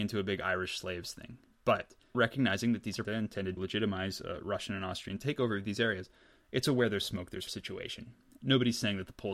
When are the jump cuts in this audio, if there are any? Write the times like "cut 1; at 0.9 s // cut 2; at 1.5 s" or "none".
cut 1; at 2.1 s // cut 2; at 3.0 s // cut 3; at 3.6 s // cut 4; at 7.5 s